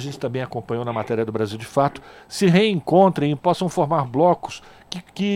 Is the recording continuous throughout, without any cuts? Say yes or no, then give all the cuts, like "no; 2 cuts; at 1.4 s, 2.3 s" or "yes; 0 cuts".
yes; 0 cuts